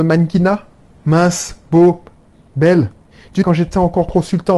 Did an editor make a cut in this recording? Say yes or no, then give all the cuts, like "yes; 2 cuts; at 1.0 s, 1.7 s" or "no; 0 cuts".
yes; 1 cut; at 3.4 s